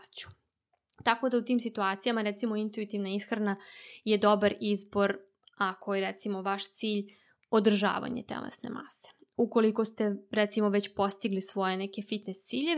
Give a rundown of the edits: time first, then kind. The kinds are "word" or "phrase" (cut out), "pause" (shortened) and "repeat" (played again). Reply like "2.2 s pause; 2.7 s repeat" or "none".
none